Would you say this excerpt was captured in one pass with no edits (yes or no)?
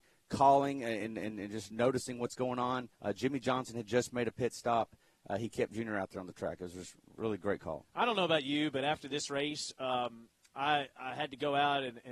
no